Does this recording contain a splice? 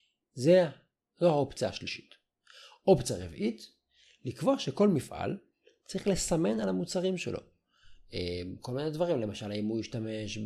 no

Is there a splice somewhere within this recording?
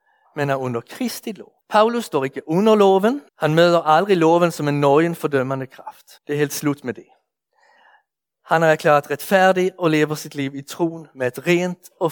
yes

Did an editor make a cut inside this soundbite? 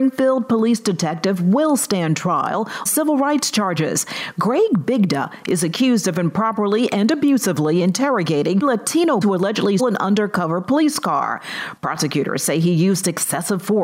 yes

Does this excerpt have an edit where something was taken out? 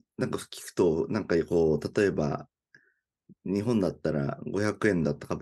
no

